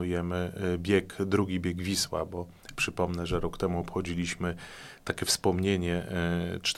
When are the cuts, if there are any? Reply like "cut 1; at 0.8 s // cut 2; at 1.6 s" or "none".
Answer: none